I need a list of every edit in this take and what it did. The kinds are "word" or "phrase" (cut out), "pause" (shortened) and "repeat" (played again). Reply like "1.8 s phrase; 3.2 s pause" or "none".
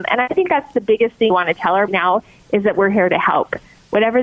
1.3 s word; 1.9 s phrase